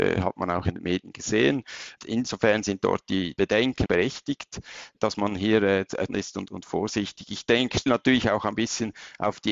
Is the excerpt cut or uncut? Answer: cut